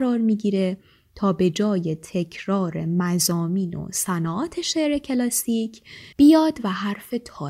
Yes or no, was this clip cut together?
yes